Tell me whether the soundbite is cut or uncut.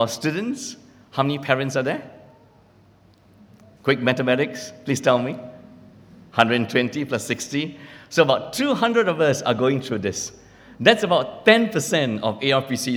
uncut